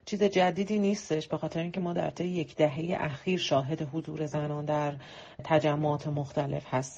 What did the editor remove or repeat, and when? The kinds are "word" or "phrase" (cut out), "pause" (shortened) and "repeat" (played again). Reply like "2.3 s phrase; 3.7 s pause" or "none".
none